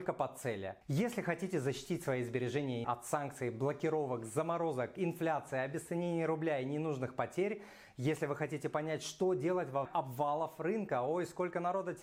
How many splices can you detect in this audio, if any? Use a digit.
2